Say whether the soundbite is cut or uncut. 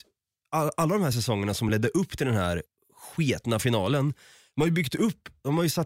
uncut